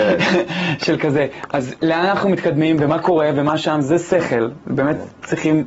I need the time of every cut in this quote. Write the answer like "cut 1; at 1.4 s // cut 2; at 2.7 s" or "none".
none